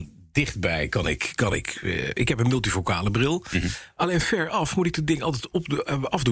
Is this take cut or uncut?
uncut